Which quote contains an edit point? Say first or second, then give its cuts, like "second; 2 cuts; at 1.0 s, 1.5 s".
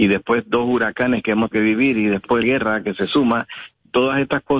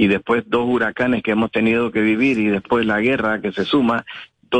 first; 2 cuts; at 1.5 s, 2.4 s